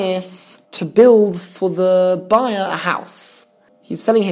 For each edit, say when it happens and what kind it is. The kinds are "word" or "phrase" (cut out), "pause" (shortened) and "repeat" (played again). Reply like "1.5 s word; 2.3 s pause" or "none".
none